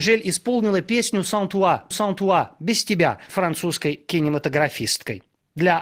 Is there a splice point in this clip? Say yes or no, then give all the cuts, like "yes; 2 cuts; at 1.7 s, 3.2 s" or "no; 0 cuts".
yes; 2 cuts; at 1.9 s, 3.3 s